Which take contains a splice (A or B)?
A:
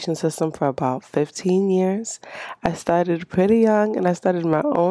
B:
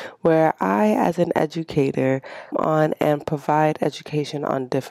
B